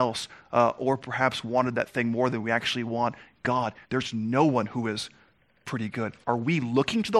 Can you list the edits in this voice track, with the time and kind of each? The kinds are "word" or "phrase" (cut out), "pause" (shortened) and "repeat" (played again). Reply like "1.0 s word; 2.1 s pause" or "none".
3.8 s pause; 6.2 s pause